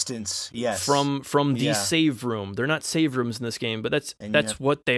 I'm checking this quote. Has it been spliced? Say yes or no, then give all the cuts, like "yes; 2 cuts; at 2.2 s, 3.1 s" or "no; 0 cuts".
no; 0 cuts